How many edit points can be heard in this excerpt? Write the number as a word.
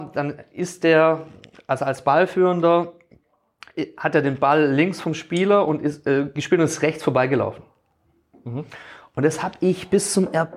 zero